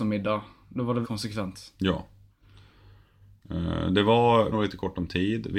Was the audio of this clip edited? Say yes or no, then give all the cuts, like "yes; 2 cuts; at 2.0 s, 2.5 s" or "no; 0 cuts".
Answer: yes; 2 cuts; at 1.0 s, 4.5 s